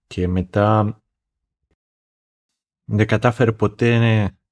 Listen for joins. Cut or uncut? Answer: uncut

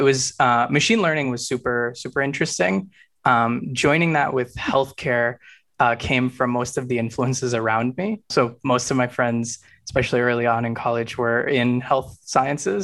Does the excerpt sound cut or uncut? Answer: uncut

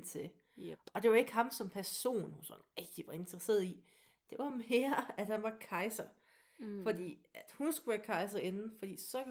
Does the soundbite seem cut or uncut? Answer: uncut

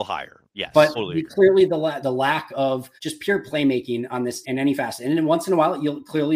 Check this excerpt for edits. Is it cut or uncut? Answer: cut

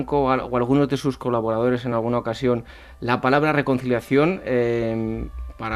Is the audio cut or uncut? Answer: uncut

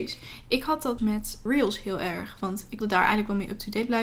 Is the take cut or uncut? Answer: cut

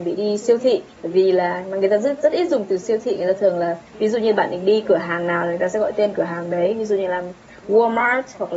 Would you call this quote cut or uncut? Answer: cut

